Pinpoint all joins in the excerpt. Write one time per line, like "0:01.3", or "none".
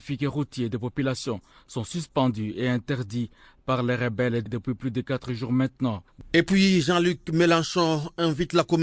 none